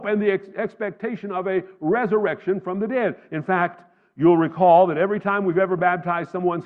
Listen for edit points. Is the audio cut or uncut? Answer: uncut